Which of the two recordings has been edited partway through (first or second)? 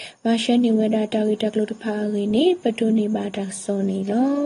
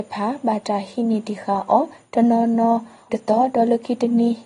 second